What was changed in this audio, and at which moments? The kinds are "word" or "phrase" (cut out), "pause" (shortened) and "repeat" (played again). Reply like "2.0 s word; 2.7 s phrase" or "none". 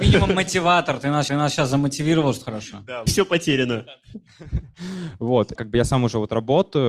1.3 s repeat; 2.4 s word; 3.1 s phrase; 5.6 s phrase